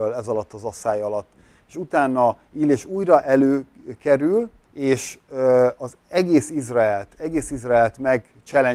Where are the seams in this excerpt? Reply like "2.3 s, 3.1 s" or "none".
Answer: 4.6 s